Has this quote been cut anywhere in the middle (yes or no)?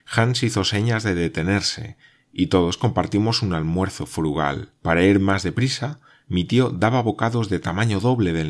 yes